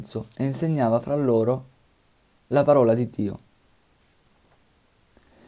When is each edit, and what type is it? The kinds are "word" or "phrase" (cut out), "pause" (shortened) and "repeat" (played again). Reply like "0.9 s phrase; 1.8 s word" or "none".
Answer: none